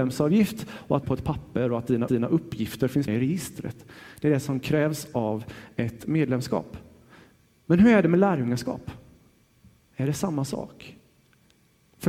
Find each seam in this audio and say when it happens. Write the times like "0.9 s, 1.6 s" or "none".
1.0 s, 2.1 s, 3.1 s